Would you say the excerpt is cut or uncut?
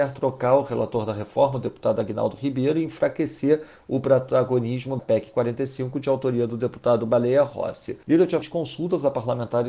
cut